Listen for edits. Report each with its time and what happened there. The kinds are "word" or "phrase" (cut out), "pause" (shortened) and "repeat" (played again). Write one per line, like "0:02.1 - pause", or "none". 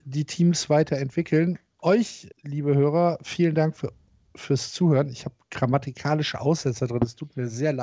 0:02.3 - pause